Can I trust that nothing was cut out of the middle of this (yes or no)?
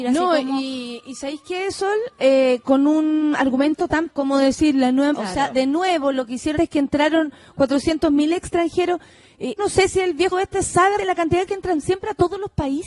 no